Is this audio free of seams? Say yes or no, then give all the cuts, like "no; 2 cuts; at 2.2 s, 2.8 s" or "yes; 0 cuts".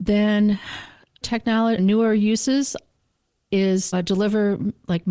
no; 3 cuts; at 1.2 s, 1.8 s, 3.9 s